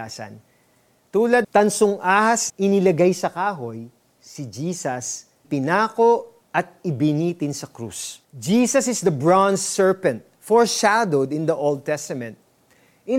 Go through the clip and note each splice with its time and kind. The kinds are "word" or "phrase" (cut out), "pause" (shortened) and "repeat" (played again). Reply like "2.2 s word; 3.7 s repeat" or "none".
1.4 s word; 2.5 s word; 4.0 s pause; 5.4 s word; 6.4 s pause; 8.2 s pause